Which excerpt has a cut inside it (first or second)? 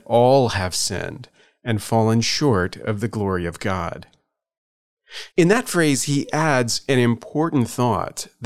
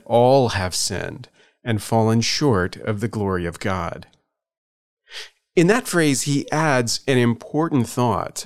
first